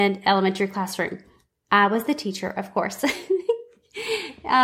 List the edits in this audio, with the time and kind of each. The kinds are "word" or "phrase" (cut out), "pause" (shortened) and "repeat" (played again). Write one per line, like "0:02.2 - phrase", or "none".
none